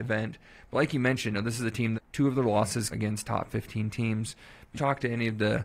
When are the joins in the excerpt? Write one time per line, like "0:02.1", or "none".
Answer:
0:01.3
0:01.9
0:02.9
0:04.7